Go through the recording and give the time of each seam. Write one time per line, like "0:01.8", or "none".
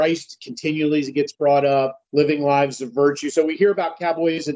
0:02.1